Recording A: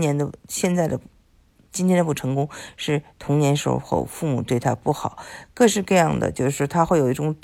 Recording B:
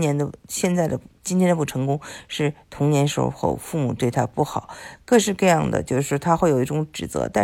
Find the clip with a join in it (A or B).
B